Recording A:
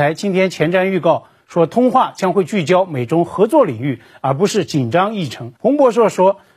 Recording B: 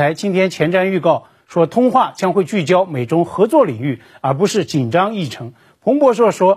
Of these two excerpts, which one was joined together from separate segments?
A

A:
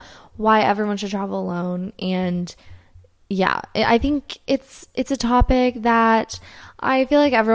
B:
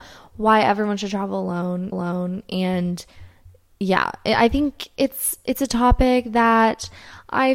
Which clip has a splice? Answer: B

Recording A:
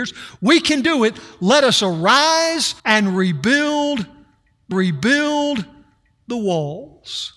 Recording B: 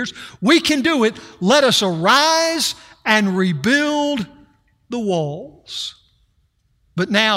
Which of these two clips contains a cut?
A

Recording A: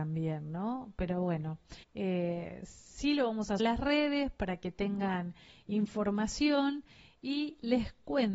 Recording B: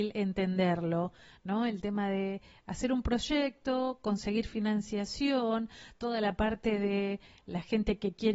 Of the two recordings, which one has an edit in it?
A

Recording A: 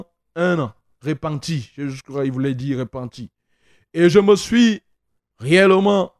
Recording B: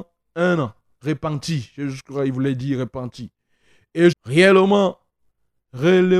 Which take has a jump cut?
B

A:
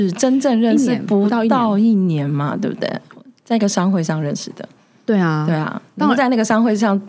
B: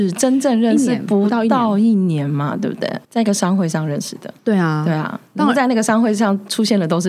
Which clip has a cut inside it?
B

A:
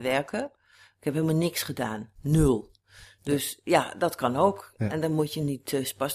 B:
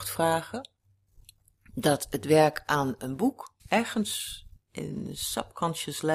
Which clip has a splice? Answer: B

